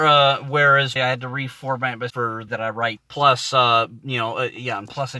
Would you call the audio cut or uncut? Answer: cut